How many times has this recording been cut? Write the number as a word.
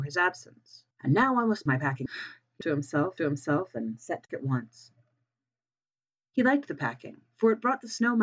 six